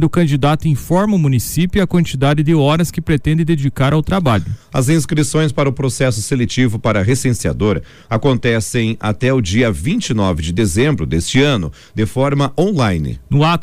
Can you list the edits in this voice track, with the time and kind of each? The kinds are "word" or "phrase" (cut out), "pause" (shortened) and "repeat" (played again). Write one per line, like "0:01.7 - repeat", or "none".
none

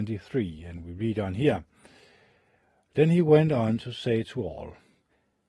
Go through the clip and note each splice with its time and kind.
none

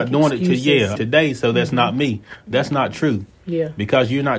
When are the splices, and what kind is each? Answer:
0:01.0 - phrase

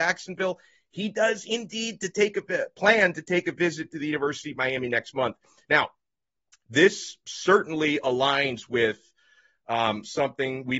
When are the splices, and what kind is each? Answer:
none

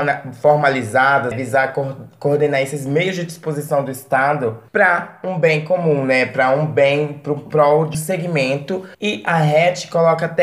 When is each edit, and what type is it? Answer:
0:01.3 - word
0:04.7 - pause
0:07.9 - word
0:08.9 - pause

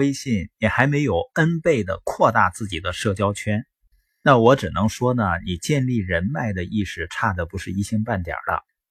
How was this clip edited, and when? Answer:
none

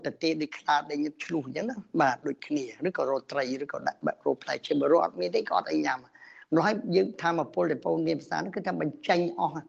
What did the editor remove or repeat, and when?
none

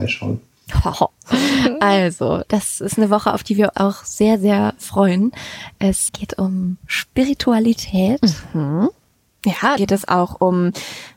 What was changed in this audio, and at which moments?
0:00.9 - word
0:02.5 - word
0:03.7 - word
0:06.1 - word
0:09.8 - word

